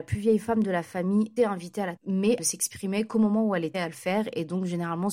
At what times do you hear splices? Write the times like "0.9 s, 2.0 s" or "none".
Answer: 1.4 s, 2.0 s, 2.4 s, 3.7 s

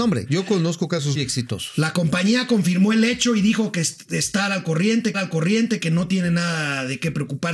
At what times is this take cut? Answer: 1.1 s, 5.1 s

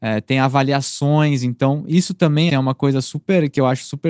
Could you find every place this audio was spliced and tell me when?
2.5 s

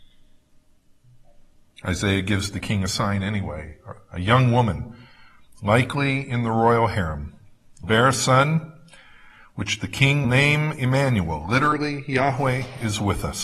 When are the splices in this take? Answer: 7.8 s, 10.2 s

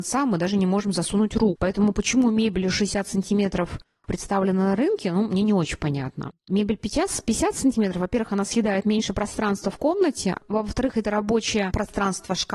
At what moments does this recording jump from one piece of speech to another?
none

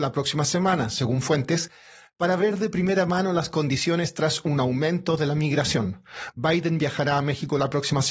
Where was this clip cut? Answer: none

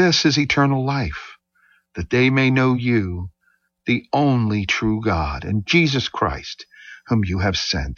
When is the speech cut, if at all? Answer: none

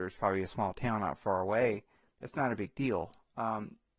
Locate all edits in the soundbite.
none

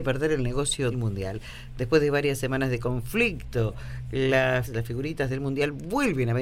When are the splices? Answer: 0.9 s, 4.6 s

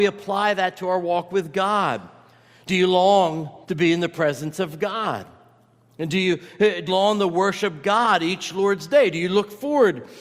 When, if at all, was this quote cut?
3.6 s, 6.9 s

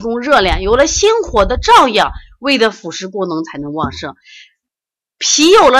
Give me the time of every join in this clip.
none

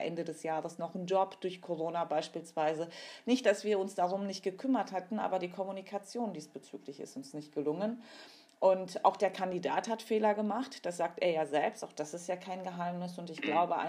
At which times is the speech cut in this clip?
none

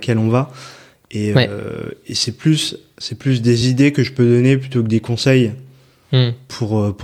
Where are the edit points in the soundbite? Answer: none

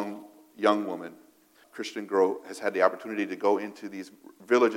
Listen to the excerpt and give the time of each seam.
1.6 s

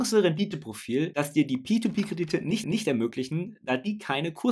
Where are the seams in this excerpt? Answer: 2.6 s

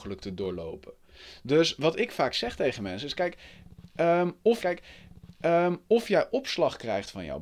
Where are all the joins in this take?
4.6 s

